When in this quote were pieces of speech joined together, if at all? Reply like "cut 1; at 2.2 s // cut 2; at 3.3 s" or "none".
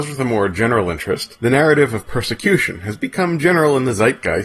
none